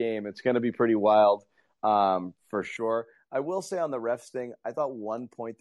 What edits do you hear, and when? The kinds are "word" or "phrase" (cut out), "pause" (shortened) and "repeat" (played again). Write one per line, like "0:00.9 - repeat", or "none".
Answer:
none